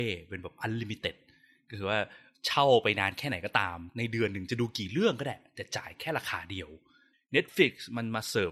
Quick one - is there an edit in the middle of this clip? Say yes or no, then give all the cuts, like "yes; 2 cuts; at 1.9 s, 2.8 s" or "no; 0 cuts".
no; 0 cuts